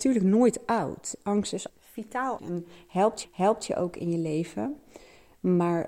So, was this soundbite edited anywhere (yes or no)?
yes